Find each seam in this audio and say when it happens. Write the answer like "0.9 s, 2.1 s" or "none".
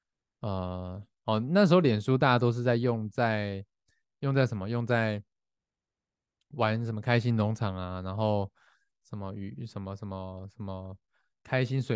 none

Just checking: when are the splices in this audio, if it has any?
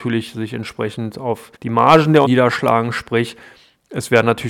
1.6 s, 2.2 s

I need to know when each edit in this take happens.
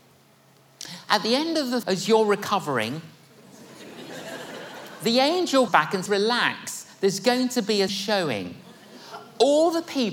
1.8 s, 5.7 s, 6.1 s, 7.9 s

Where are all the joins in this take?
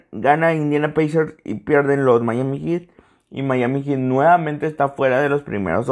none

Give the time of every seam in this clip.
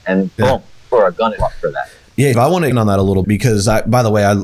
0.9 s, 1.4 s, 2.3 s, 2.7 s, 3.2 s

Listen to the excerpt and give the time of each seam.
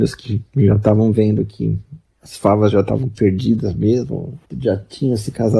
4.4 s

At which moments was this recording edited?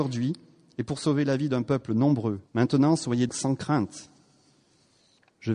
2.5 s, 3.3 s

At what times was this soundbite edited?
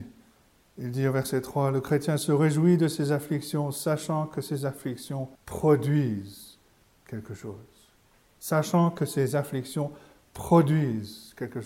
5.3 s, 8.0 s

